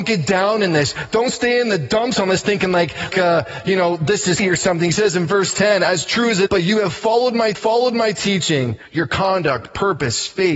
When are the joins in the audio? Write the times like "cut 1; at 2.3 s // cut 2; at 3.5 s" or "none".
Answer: cut 1; at 3.1 s // cut 2; at 4.4 s // cut 3; at 6.5 s // cut 4; at 7.5 s